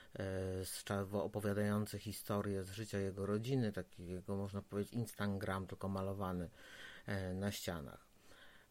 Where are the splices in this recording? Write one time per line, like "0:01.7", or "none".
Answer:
none